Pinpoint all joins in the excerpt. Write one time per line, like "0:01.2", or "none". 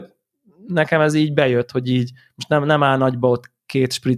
none